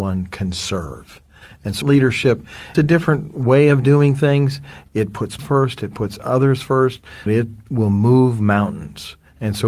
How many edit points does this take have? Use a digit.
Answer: 4